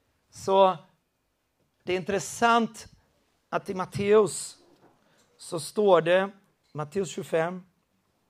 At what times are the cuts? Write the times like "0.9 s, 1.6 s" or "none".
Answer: none